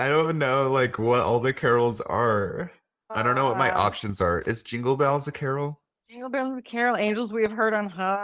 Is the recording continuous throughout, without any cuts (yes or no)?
no